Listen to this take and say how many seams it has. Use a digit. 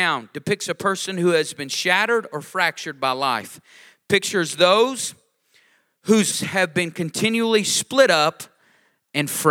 1